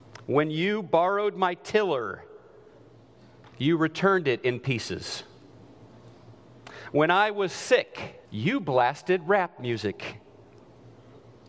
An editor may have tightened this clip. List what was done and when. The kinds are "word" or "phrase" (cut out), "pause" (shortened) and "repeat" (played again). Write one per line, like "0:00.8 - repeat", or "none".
0:03.5 - pause
0:08.2 - pause